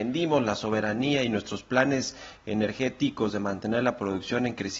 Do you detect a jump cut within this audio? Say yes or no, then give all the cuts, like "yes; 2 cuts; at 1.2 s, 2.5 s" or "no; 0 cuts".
no; 0 cuts